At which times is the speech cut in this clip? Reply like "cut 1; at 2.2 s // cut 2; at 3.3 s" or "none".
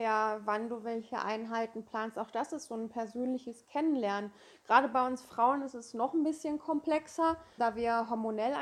cut 1; at 7.6 s